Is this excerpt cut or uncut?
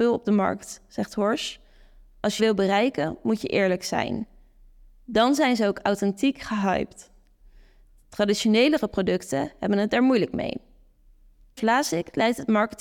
cut